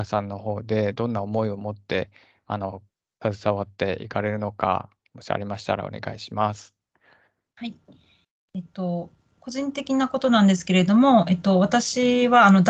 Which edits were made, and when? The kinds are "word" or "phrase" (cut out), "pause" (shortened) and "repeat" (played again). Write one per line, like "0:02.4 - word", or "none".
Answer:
none